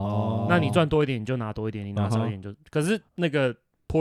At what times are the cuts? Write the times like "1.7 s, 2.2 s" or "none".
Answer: 3.1 s